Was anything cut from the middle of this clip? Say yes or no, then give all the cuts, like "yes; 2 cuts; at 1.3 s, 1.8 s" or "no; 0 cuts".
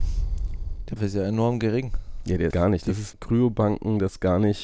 yes; 3 cuts; at 1.0 s, 2.5 s, 3.1 s